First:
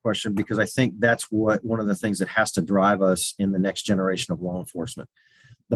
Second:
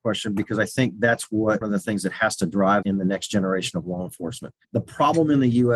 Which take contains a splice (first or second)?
second